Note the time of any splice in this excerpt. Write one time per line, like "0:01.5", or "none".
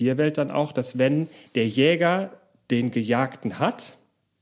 none